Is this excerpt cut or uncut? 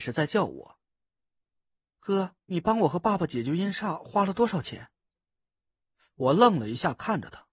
cut